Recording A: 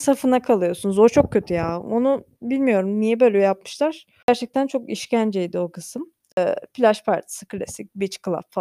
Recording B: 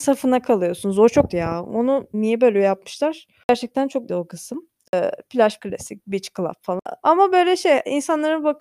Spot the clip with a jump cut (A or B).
B